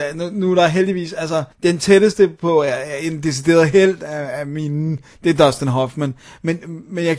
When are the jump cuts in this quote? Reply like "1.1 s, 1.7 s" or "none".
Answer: 1.5 s